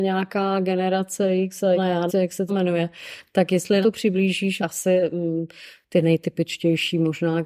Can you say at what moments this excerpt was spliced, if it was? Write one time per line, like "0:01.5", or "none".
0:01.8
0:02.1
0:02.5
0:03.8
0:04.6